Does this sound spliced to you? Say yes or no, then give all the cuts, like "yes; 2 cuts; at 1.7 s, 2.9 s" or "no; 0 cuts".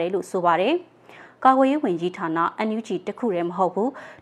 no; 0 cuts